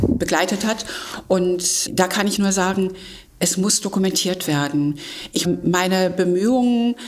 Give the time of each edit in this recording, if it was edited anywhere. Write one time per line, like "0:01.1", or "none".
0:01.9
0:02.4
0:03.3
0:05.4